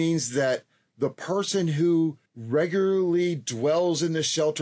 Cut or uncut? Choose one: cut